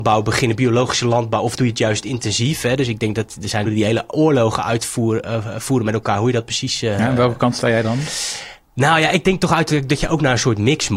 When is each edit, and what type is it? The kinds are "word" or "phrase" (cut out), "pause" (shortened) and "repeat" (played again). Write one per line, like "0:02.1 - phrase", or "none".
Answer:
0:03.6 - phrase